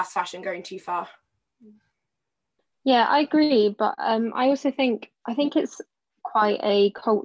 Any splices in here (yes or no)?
no